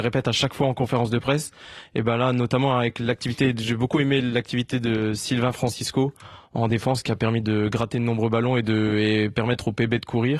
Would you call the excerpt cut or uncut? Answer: uncut